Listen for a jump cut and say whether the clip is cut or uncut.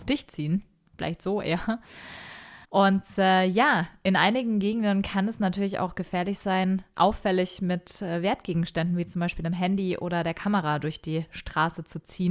cut